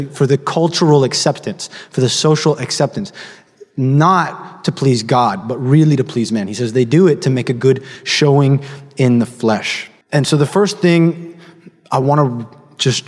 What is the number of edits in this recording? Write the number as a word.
one